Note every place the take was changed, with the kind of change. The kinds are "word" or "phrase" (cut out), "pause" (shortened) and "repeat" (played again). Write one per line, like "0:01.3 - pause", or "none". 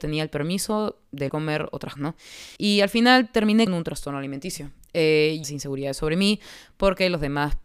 0:01.3 - phrase
0:02.0 - word
0:02.6 - pause
0:03.7 - word
0:05.4 - phrase